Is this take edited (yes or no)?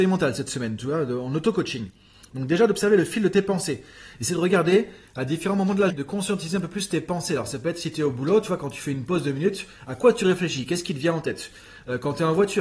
yes